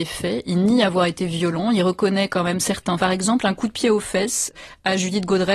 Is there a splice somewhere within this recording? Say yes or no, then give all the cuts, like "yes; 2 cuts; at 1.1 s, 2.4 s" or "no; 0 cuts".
yes; 1 cut; at 3.0 s